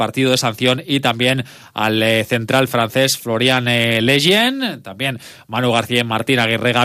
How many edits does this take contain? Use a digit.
0